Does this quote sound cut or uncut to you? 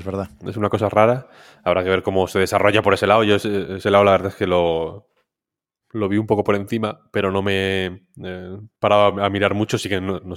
uncut